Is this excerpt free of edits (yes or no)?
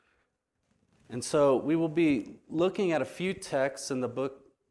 yes